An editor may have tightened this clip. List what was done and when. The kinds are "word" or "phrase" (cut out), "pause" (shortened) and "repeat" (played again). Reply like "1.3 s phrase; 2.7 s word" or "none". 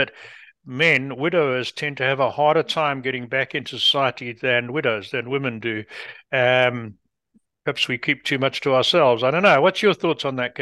none